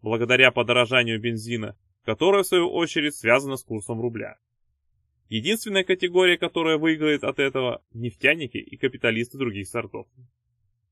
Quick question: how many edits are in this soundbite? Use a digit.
1